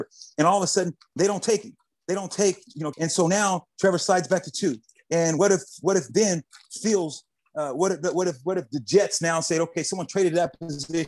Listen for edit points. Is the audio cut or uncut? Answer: cut